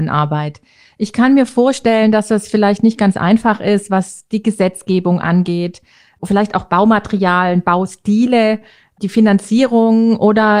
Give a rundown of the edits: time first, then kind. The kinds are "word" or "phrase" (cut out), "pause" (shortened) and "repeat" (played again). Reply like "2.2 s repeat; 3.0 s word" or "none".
none